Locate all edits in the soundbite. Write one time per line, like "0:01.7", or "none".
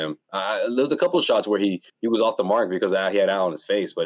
0:01.9